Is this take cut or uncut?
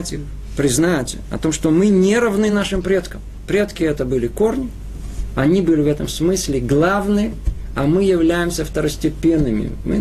uncut